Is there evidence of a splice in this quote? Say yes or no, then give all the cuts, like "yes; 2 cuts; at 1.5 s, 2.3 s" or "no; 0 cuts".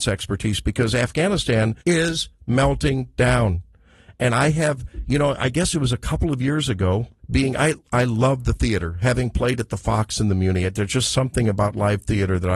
yes; 2 cuts; at 1.8 s, 7.2 s